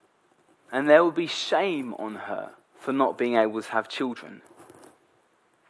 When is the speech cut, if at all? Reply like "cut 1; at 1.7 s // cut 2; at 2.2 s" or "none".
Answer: cut 1; at 2.6 s